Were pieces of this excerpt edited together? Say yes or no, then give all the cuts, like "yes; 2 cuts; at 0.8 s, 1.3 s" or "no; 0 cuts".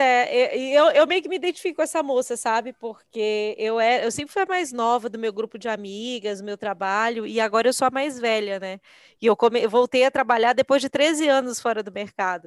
no; 0 cuts